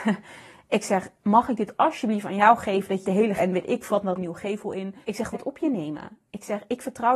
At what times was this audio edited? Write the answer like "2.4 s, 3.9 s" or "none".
1.2 s, 3.0 s, 3.4 s, 4.2 s, 5.0 s, 5.3 s